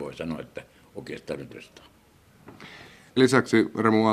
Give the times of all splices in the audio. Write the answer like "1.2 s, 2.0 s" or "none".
1.5 s, 3.2 s